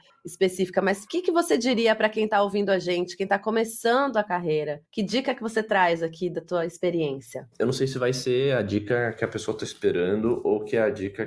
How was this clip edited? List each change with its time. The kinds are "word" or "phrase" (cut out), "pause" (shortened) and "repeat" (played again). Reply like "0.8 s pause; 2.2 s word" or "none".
4.9 s pause